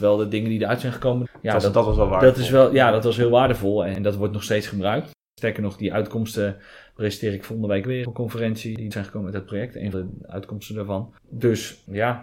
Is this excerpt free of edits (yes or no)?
no